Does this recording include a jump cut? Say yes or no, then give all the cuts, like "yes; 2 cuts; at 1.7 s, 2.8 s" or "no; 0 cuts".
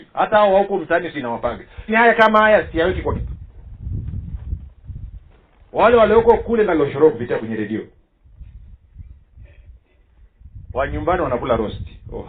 yes; 4 cuts; at 1.1 s, 1.9 s, 3.1 s, 6.7 s